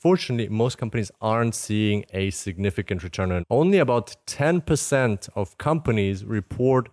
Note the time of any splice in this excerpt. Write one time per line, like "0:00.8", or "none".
0:03.4

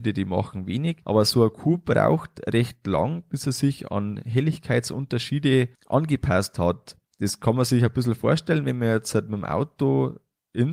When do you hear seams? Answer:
0:01.0
0:05.7

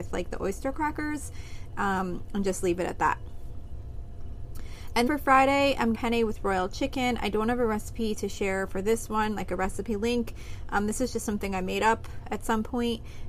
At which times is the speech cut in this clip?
0:05.1
0:05.9

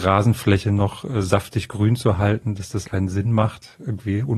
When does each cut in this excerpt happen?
0:02.8

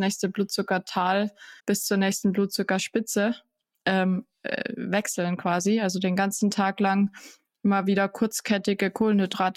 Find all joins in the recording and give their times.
0:01.6

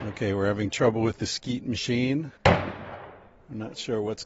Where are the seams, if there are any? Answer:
0:02.4

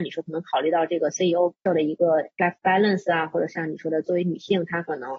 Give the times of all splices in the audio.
0:01.7
0:02.4

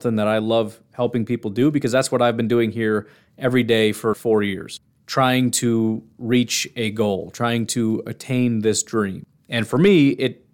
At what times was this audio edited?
0:04.1

